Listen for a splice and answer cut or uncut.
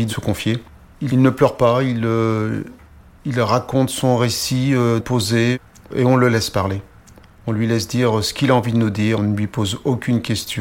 cut